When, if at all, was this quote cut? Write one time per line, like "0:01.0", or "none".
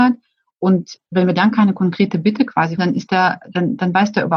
0:02.8